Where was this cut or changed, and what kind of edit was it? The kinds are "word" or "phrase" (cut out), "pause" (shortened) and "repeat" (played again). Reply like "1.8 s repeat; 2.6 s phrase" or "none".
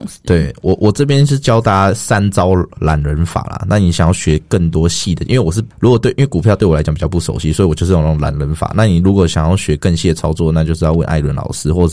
5.7 s pause